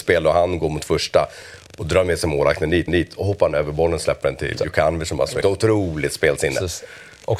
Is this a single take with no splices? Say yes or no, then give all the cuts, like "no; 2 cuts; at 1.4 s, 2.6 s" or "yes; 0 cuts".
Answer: no; 3 cuts; at 2.9 s, 4.6 s, 5.4 s